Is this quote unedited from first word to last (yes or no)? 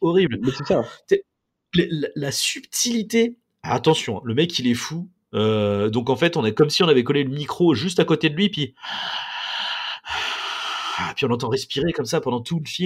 yes